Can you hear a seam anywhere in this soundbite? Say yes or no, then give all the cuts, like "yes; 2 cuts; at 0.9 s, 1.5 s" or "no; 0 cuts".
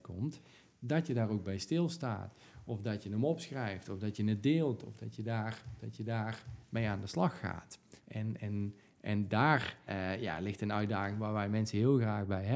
yes; 3 cuts; at 5.8 s, 8.0 s, 9.9 s